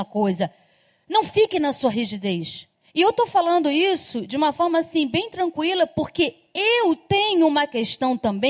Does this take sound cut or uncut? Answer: cut